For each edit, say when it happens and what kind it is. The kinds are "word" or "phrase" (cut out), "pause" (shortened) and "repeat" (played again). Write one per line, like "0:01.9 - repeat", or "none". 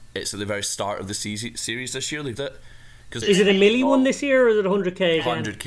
0:02.3 - word
0:03.2 - word